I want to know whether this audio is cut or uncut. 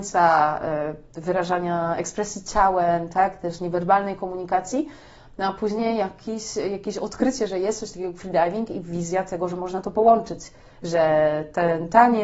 uncut